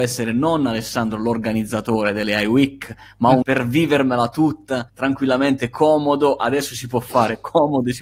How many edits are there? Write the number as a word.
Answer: two